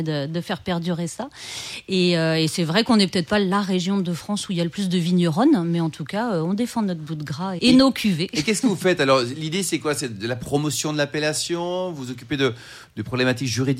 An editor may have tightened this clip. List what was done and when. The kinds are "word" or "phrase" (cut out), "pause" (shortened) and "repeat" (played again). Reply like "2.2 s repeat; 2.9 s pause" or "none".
7.6 s word

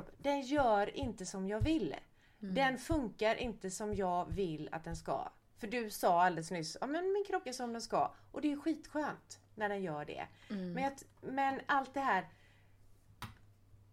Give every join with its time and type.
7.5 s word

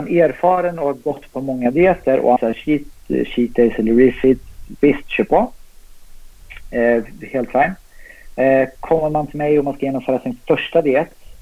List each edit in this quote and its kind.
2.4 s word

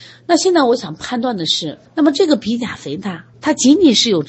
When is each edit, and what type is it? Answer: 1.9 s pause; 3.3 s pause

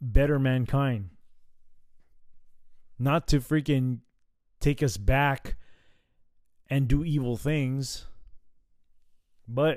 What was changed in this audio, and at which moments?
none

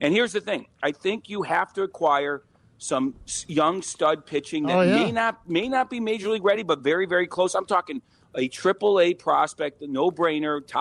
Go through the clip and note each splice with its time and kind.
none

